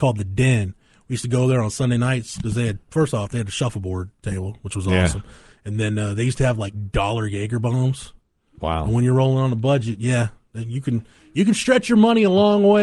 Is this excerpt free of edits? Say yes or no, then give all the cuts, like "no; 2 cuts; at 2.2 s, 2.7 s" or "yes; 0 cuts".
yes; 0 cuts